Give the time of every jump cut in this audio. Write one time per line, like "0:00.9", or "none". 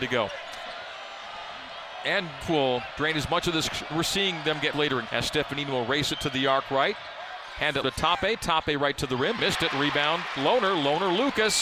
0:02.4
0:03.9
0:04.7
0:05.1
0:07.8
0:09.4